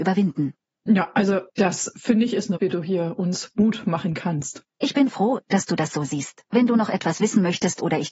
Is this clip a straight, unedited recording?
no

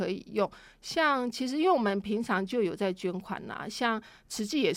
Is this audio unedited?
yes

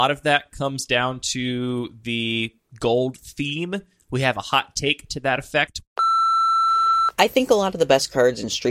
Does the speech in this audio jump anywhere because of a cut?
no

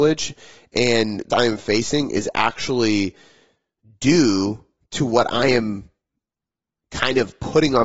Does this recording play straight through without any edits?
no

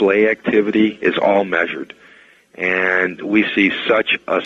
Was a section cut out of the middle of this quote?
no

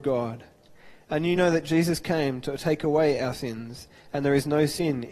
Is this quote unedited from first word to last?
yes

